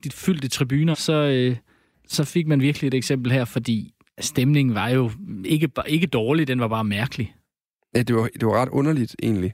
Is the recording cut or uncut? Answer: cut